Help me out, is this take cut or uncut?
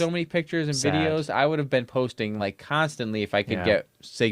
uncut